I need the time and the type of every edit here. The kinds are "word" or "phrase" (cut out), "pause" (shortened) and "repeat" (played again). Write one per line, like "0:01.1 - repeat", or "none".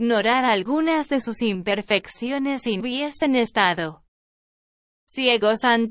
0:02.8 - word